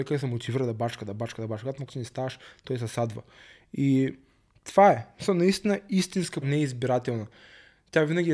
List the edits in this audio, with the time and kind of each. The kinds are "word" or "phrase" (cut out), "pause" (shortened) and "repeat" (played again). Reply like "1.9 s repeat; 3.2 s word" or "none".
1.9 s word; 6.4 s word